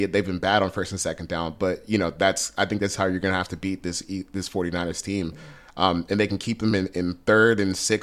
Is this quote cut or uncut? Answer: uncut